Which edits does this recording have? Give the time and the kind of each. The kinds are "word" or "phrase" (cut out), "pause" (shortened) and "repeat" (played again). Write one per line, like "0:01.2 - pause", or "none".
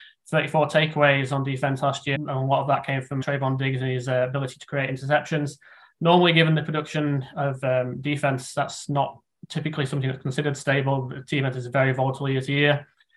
0:02.1 - word
0:03.2 - word